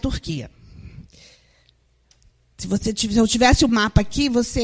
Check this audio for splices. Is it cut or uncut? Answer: uncut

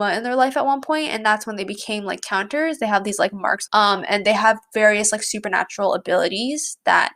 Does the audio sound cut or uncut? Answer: cut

